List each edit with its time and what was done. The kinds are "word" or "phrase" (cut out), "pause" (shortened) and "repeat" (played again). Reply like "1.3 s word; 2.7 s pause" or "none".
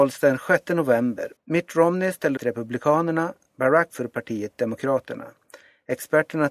1.4 s pause; 2.4 s phrase; 3.9 s phrase